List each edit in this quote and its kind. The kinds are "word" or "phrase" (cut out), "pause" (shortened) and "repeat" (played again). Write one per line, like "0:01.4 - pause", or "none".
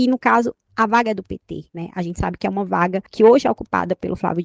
0:01.7 - pause
0:03.1 - pause